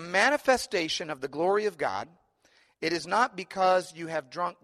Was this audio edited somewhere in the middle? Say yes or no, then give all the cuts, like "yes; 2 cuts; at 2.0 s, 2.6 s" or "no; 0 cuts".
no; 0 cuts